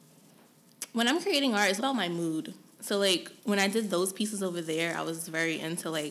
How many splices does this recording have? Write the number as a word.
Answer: two